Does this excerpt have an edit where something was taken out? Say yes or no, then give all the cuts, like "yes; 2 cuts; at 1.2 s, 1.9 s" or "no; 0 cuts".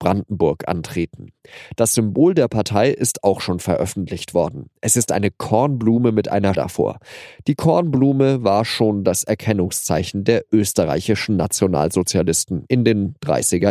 yes; 1 cut; at 6.5 s